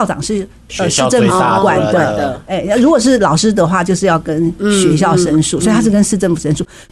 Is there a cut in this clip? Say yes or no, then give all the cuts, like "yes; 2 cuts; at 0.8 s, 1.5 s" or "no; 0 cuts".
no; 0 cuts